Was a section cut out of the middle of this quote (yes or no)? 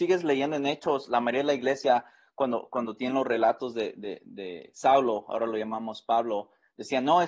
no